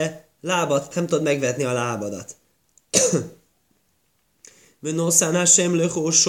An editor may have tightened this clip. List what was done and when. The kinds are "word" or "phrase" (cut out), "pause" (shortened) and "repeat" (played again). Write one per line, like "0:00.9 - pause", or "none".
0:00.9 - word